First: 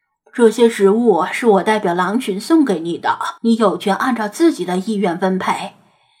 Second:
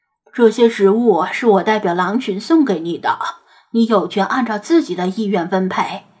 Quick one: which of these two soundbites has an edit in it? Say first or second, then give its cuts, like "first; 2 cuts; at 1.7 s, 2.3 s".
first; 1 cut; at 3.4 s